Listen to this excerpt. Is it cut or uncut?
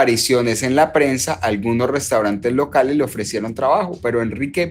uncut